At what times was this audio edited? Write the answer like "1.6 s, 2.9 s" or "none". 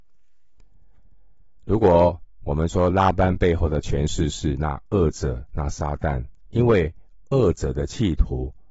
6.5 s